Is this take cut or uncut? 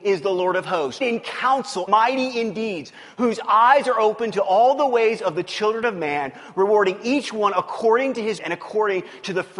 cut